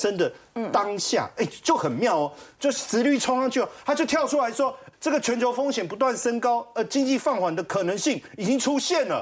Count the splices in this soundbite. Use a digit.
1